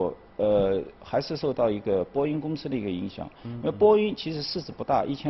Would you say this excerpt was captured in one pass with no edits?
yes; 0 cuts

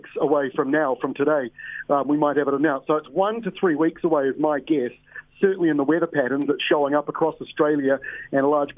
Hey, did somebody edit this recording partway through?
no; 0 cuts

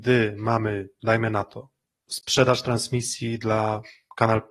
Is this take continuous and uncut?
yes; 0 cuts

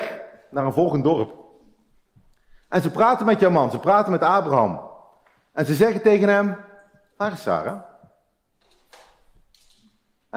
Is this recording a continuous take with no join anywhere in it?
yes; 0 cuts

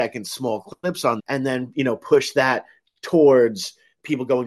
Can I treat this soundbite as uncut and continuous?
no; 1 cut; at 1.2 s

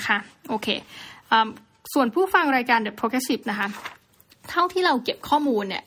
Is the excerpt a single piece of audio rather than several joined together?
no; 1 cut; at 3.4 s

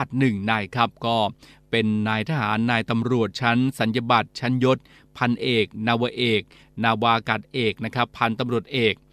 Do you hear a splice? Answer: no; 0 cuts

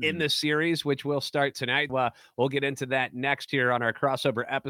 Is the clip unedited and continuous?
no; 1 cut; at 1.9 s

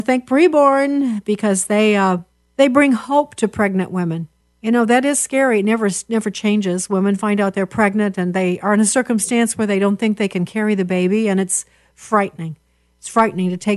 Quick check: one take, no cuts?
no; 2 cuts; at 2.3 s, 4.4 s

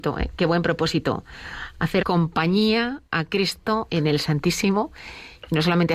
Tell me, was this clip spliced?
yes; 3 cuts; at 2.0 s, 3.1 s, 3.9 s

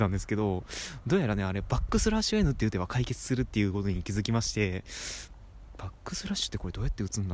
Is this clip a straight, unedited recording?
yes; 0 cuts

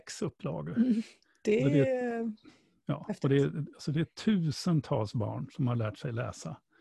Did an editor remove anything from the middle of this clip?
no; 0 cuts

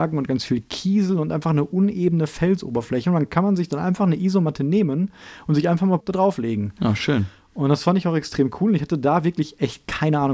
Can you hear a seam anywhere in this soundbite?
yes; 1 cut; at 6.0 s

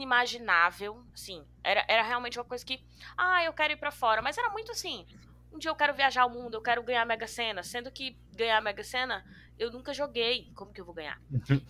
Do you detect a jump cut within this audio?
no; 0 cuts

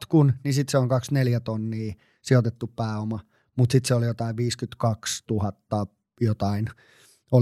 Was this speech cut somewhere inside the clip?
no; 0 cuts

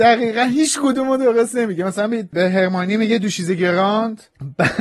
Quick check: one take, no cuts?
yes; 0 cuts

